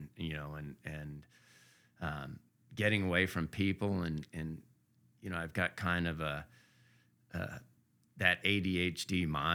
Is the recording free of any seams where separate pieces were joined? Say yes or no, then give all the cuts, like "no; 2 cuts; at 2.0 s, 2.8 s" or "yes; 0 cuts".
yes; 0 cuts